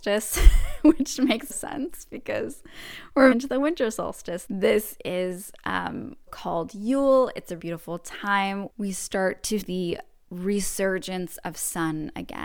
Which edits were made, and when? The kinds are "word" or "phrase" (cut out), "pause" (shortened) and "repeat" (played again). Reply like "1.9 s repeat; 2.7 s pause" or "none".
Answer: 1.5 s word; 3.3 s word; 4.5 s word; 6.3 s word; 7.6 s word; 8.7 s word; 9.6 s word